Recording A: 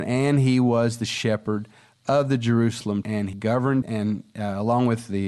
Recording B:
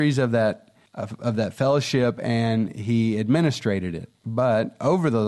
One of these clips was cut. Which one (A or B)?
A